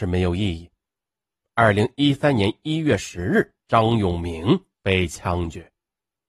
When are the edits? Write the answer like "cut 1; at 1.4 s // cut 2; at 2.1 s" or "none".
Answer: cut 1; at 3.6 s // cut 2; at 4.7 s